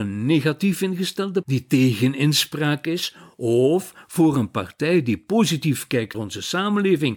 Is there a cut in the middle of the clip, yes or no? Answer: yes